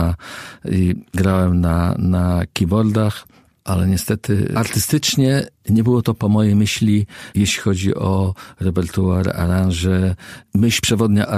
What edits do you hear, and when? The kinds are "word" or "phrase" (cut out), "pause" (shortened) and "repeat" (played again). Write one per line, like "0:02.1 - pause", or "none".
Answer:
none